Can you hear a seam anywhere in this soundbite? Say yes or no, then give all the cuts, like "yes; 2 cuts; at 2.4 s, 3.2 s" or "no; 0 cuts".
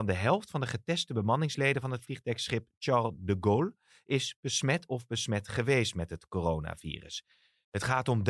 no; 0 cuts